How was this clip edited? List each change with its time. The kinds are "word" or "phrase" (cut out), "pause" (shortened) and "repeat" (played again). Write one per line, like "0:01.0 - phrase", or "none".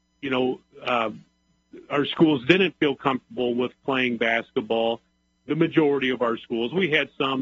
none